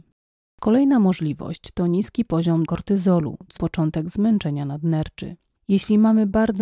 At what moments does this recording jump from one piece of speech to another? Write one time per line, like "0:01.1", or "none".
0:02.7
0:03.6